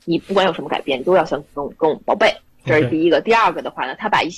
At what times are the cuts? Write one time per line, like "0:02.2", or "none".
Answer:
none